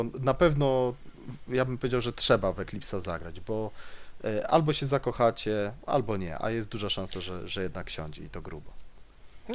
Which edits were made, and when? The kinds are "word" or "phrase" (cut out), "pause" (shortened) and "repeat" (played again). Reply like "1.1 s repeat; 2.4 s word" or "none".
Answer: none